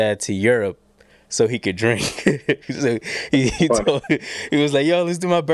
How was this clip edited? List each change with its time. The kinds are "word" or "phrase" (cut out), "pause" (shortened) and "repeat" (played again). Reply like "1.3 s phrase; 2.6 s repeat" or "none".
none